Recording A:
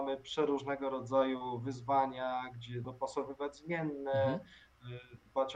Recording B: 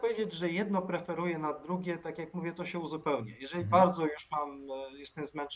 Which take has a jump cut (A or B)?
A